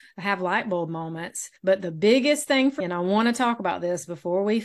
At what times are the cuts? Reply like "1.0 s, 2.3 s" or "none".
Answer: 1.6 s, 2.8 s